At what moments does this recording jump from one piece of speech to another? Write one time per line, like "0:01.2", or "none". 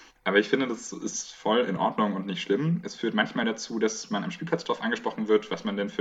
none